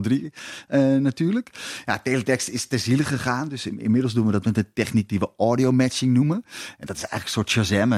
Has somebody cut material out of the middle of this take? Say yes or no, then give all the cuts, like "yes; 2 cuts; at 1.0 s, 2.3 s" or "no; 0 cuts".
no; 0 cuts